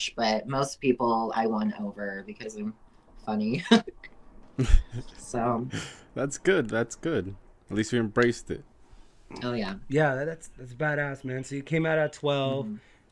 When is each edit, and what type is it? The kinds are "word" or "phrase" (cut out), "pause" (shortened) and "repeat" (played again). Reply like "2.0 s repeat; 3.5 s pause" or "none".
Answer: none